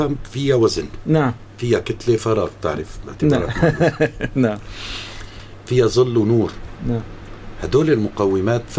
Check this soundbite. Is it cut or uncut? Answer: uncut